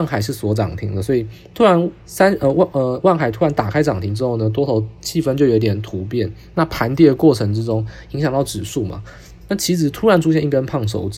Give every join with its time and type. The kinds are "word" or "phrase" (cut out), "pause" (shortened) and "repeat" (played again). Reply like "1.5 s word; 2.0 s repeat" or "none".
2.0 s pause